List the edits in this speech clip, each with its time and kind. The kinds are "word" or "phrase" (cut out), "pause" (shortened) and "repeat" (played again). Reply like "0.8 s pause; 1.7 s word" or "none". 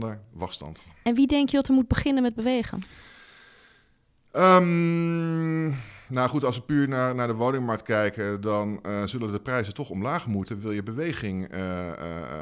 none

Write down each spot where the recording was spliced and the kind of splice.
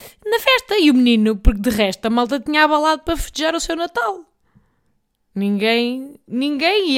none

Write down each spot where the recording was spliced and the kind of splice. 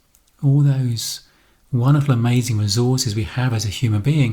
none

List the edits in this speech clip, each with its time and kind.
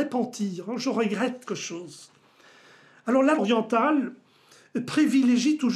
1.5 s word; 3.4 s word

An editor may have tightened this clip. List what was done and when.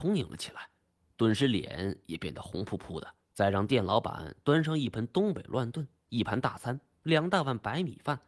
3.2 s pause

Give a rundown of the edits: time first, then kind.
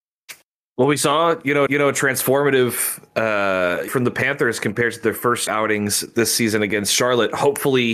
1.7 s repeat; 3.9 s phrase; 5.5 s word

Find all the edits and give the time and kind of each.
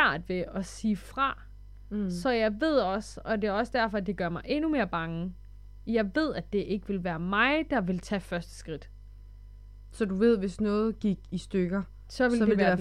none

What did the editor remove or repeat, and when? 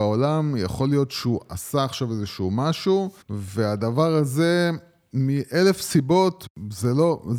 3.2 s pause

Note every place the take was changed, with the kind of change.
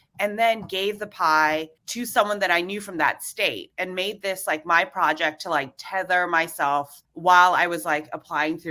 1.8 s pause; 7.0 s pause

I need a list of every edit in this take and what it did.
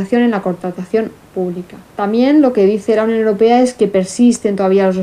1.9 s pause

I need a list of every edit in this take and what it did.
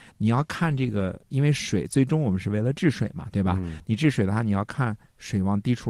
1.2 s pause

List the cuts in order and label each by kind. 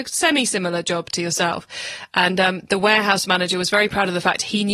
none

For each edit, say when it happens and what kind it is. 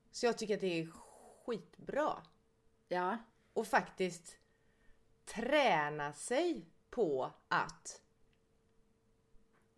none

